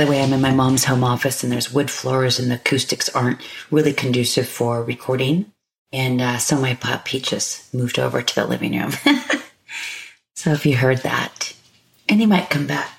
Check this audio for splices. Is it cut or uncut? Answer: uncut